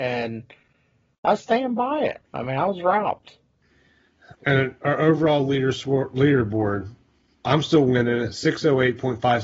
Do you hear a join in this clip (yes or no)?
yes